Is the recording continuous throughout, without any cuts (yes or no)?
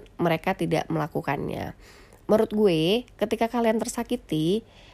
yes